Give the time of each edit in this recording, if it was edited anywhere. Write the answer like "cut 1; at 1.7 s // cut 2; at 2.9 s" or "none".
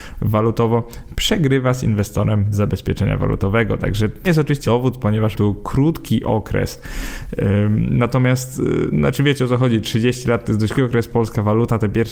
cut 1; at 2.5 s // cut 2; at 4.2 s // cut 3; at 4.6 s // cut 4; at 5.3 s // cut 5; at 8.9 s // cut 6; at 10.7 s // cut 7; at 11.1 s